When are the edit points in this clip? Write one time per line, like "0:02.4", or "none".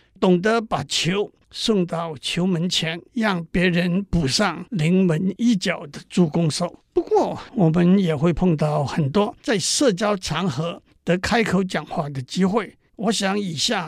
0:03.1
0:06.9
0:09.4
0:12.9